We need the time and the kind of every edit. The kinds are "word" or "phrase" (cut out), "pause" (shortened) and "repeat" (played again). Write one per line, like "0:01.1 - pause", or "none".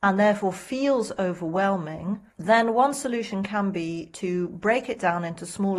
0:02.3 - pause